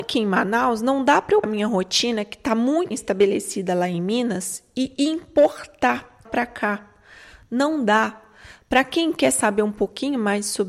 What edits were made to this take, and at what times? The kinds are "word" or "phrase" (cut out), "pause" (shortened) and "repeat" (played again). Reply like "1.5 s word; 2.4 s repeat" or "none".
1.4 s word; 2.9 s word; 6.2 s word